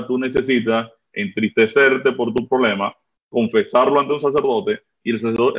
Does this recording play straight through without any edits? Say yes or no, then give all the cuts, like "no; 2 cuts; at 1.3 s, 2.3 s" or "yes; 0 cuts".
yes; 0 cuts